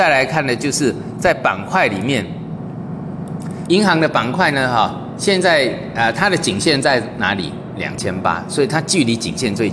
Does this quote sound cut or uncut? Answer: cut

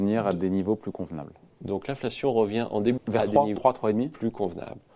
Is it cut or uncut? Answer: cut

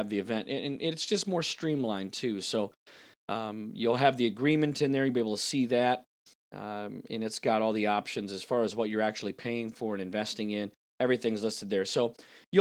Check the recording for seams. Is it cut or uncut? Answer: uncut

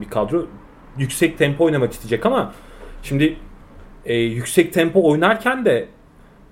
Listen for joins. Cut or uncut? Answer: uncut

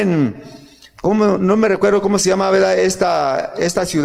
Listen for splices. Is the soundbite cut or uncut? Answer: uncut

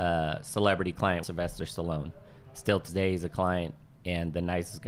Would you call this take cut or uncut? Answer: cut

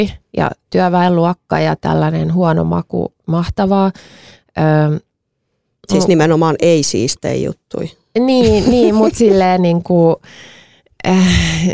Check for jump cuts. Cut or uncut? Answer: uncut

